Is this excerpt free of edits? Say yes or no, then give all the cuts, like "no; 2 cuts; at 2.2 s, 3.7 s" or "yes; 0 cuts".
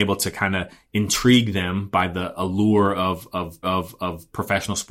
no; 1 cut; at 3.6 s